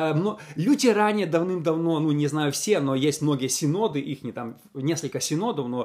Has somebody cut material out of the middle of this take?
no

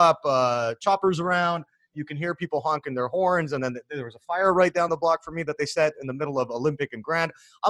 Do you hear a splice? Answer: no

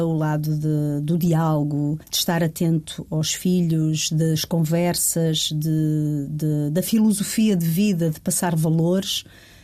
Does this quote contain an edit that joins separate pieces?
yes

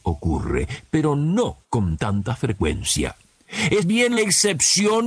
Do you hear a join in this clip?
yes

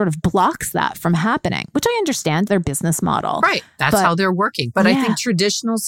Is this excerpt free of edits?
no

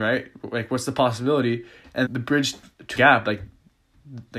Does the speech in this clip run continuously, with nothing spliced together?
no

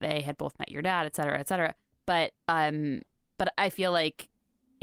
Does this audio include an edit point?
no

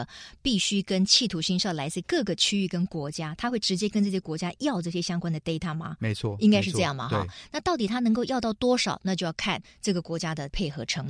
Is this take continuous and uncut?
yes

